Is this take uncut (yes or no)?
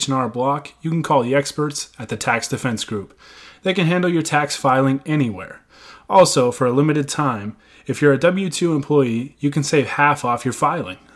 yes